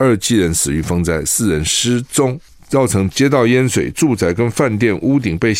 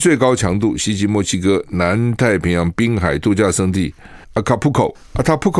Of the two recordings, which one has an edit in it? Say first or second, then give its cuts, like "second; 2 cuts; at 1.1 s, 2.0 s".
second; 1 cut; at 4.2 s